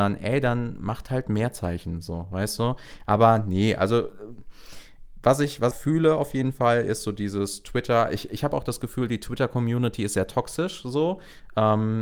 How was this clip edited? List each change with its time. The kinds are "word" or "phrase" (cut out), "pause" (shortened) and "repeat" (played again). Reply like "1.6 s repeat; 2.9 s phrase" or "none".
5.7 s phrase